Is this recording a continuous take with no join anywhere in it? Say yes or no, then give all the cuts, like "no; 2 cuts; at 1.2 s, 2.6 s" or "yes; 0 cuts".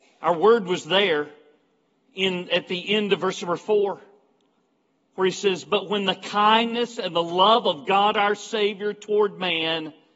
yes; 0 cuts